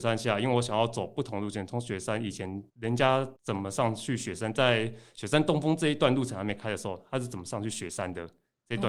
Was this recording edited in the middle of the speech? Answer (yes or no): yes